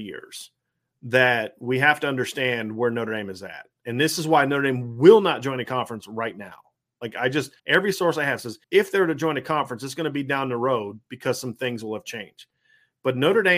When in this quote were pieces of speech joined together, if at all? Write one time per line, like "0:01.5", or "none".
0:07.6
0:08.6